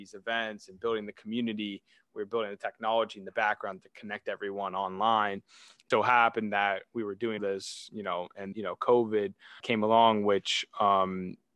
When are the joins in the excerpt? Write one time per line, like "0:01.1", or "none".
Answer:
0:05.9
0:07.4
0:08.5
0:09.6